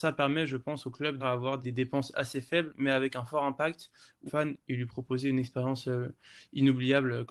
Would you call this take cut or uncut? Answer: cut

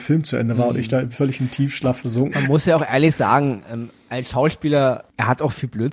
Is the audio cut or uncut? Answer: cut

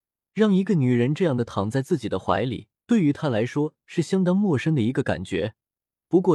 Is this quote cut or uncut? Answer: cut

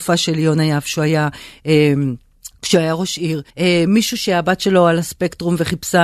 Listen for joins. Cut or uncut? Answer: cut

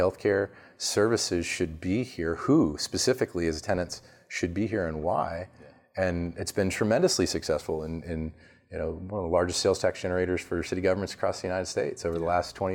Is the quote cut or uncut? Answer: uncut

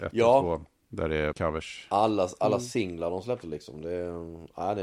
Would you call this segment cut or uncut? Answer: cut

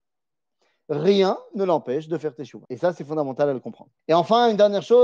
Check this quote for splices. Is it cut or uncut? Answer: cut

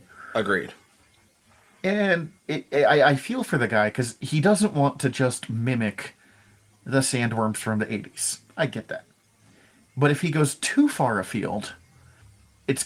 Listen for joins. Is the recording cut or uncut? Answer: cut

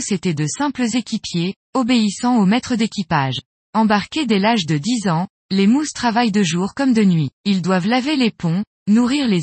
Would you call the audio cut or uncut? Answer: cut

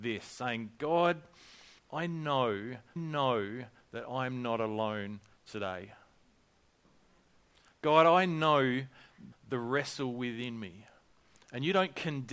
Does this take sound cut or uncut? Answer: cut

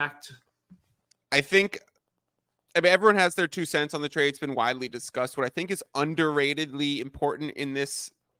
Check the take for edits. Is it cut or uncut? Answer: uncut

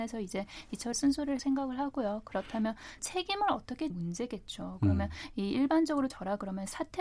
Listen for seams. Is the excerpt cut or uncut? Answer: cut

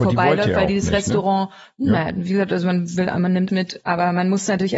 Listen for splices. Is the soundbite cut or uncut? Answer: cut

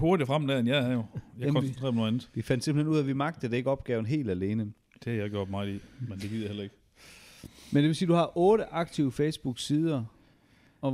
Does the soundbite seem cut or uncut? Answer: uncut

